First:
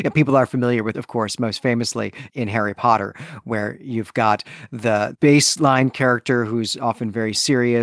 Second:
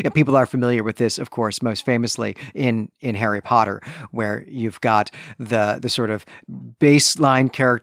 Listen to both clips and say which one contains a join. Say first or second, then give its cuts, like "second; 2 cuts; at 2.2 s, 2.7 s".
first; 3 cuts; at 0.9 s, 2.3 s, 5.1 s